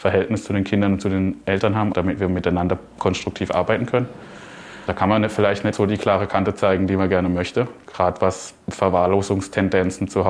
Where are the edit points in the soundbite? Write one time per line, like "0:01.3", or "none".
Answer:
0:01.9
0:05.7